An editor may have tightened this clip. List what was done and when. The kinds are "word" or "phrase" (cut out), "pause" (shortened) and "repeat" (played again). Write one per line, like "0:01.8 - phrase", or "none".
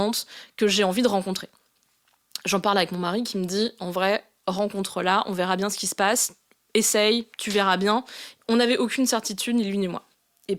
0:07.3 - pause